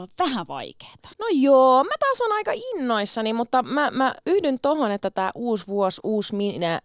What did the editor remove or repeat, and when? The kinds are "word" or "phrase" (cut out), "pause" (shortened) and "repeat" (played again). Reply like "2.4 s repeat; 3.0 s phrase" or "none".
1.1 s pause